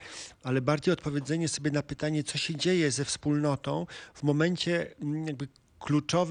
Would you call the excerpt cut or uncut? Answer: uncut